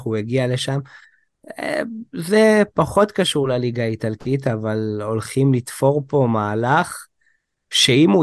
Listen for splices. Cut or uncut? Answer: uncut